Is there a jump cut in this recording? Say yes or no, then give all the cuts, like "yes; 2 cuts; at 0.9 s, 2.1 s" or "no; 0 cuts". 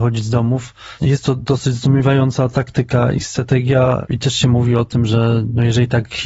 no; 0 cuts